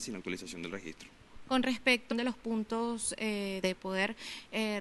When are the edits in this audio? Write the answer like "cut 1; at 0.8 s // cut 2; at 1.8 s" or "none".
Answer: cut 1; at 2.1 s // cut 2; at 3.6 s